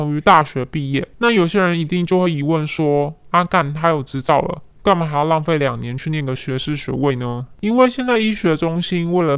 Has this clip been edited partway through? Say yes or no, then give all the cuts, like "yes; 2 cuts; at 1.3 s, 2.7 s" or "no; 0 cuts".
yes; 2 cuts; at 1.1 s, 4.7 s